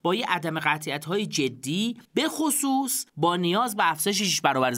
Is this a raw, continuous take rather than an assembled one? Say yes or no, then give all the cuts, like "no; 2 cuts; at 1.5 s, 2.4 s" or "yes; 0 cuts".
no; 2 cuts; at 2.0 s, 3.1 s